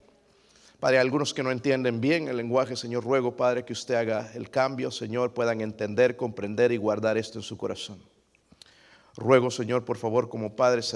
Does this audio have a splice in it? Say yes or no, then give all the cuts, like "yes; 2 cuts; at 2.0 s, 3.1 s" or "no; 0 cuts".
no; 0 cuts